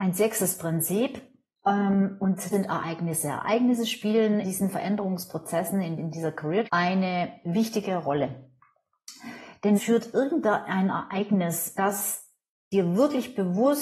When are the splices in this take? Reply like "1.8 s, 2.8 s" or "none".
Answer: 2.5 s, 4.4 s, 6.0 s, 6.6 s, 9.7 s, 11.7 s